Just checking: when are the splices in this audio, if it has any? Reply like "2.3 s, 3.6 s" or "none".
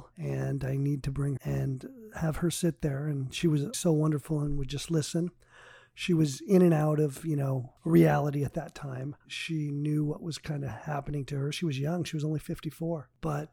1.4 s, 3.7 s, 9.2 s